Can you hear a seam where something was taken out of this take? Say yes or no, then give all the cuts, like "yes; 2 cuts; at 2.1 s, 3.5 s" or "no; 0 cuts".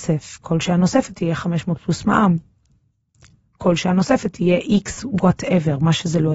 no; 0 cuts